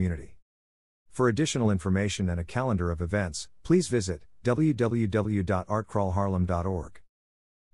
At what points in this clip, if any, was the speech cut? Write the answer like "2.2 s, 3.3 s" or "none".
none